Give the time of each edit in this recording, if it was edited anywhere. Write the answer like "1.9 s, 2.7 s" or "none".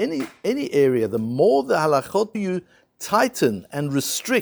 2.3 s